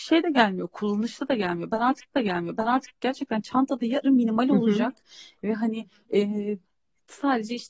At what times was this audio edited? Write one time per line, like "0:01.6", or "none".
0:02.1
0:04.0